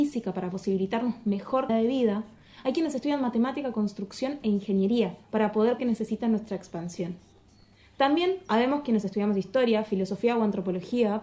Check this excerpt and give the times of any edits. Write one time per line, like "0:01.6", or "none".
0:01.7
0:05.2
0:05.8

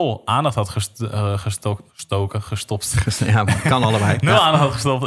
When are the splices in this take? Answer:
0:01.9

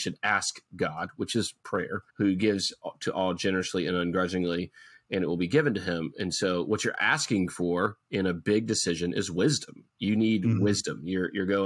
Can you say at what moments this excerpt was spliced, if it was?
none

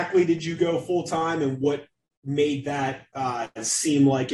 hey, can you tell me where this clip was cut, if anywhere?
none

